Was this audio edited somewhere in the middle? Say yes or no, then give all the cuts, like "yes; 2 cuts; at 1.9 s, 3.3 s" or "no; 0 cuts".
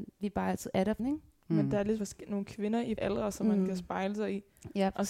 yes; 3 cuts; at 1.0 s, 2.0 s, 3.0 s